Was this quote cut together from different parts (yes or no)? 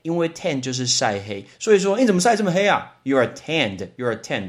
no